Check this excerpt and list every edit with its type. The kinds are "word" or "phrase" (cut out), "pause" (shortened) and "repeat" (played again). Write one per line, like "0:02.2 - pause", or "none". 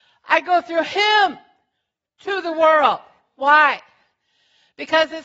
none